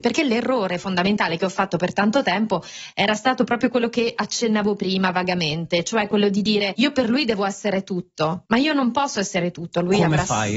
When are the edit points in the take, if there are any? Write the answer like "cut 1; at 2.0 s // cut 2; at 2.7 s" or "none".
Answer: none

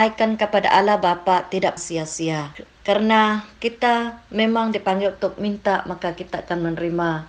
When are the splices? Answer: cut 1; at 1.8 s

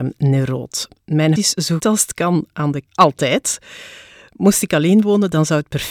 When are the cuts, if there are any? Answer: cut 1; at 1.4 s // cut 2; at 1.8 s // cut 3; at 2.9 s

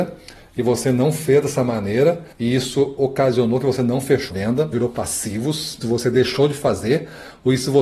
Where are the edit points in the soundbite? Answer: cut 1; at 2.3 s // cut 2; at 4.3 s // cut 3; at 4.7 s // cut 4; at 5.8 s

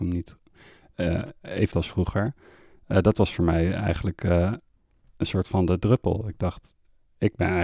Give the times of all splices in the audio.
cut 1; at 1.7 s

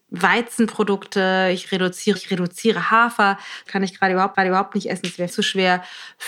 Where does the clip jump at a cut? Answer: cut 1; at 2.2 s // cut 2; at 3.7 s // cut 3; at 4.3 s // cut 4; at 5.3 s

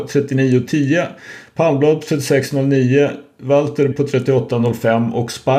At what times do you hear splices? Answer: cut 1; at 3.9 s

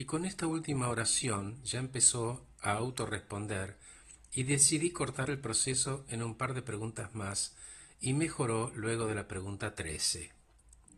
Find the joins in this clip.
none

